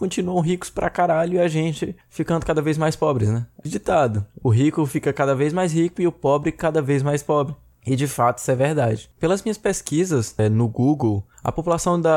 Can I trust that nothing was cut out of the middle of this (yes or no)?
no